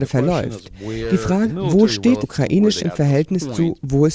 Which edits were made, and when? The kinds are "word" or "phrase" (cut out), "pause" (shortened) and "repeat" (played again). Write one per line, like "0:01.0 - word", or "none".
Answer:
0:01.5 - word
0:02.2 - word
0:02.8 - word